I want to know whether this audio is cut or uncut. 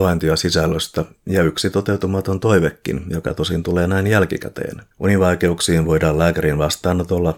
cut